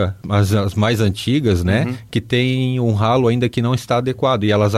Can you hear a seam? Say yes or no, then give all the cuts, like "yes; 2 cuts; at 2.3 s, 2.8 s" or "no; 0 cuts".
no; 0 cuts